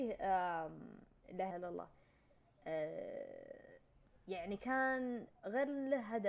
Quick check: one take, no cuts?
no; 1 cut; at 1.5 s

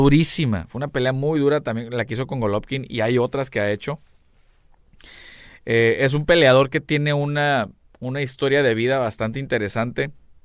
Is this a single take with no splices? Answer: yes; 0 cuts

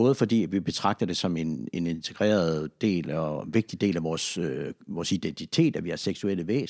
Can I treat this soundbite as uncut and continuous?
yes; 0 cuts

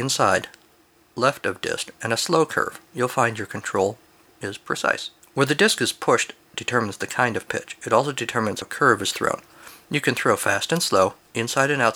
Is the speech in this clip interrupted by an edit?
yes; 1 cut; at 8.6 s

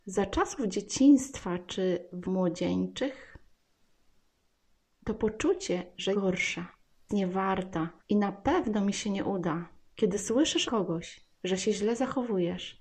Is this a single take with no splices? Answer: no; 6 cuts; at 2.2 s, 6.1 s, 7.1 s, 8.0 s, 9.8 s, 10.7 s

